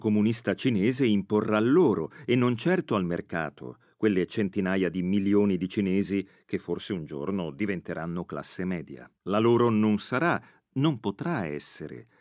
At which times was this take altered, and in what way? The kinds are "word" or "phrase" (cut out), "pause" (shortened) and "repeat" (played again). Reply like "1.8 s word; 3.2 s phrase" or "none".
9.2 s pause